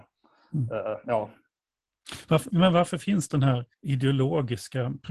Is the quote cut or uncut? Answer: cut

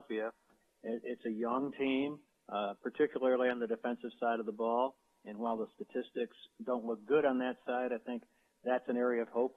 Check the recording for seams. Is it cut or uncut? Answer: uncut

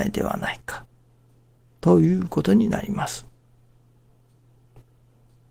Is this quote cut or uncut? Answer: uncut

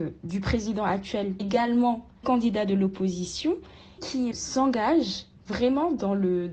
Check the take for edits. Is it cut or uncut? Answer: cut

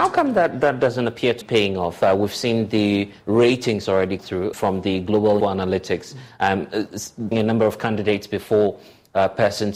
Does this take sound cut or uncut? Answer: cut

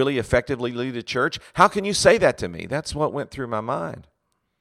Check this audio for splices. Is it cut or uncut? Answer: uncut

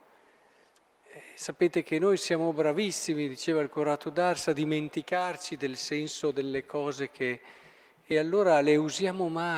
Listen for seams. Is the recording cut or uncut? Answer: uncut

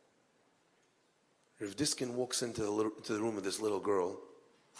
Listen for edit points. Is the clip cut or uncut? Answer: uncut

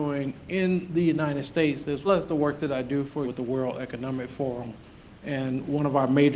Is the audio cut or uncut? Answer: cut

